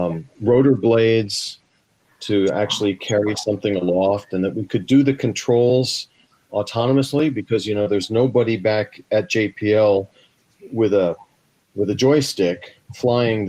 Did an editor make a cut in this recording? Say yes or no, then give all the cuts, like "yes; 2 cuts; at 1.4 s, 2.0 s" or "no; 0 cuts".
no; 0 cuts